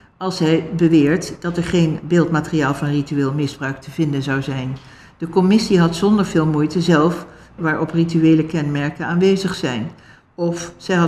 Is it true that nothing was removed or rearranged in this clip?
no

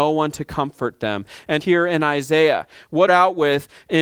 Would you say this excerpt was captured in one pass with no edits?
no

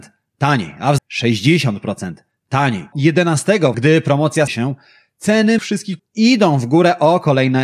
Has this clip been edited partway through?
yes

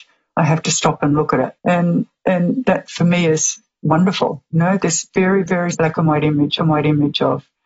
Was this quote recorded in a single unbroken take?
no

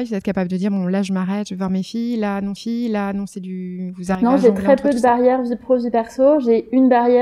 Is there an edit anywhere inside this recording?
yes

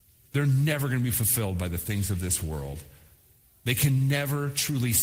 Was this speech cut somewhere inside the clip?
no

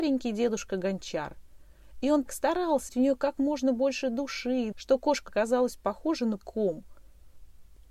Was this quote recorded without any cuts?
no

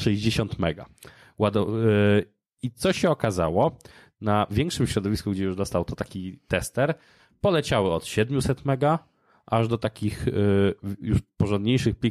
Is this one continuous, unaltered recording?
yes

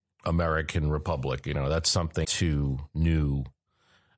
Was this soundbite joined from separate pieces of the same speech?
yes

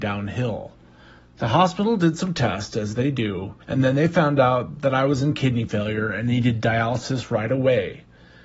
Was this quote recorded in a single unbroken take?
no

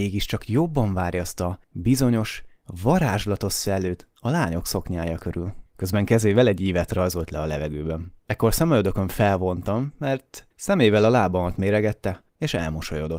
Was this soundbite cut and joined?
yes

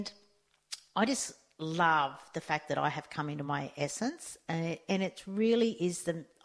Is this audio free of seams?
yes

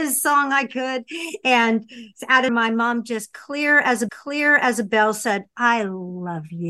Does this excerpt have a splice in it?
yes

